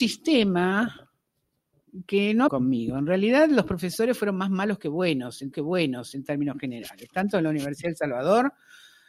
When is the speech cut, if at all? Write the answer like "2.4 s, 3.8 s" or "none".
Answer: 2.5 s, 5.5 s